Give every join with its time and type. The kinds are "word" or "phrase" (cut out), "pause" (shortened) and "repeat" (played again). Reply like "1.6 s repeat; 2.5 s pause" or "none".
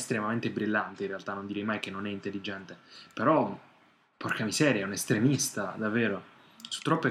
none

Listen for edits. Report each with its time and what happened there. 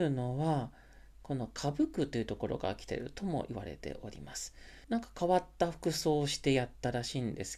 4.8 s pause

